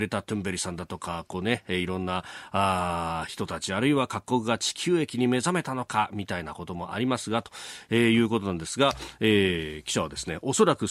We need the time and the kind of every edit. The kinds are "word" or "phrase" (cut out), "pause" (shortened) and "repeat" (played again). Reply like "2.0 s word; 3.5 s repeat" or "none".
none